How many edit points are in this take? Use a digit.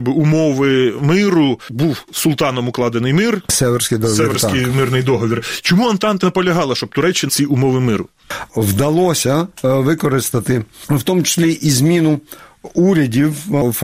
3